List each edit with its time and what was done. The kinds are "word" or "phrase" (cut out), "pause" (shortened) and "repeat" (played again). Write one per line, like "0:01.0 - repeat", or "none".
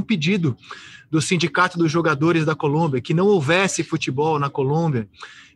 none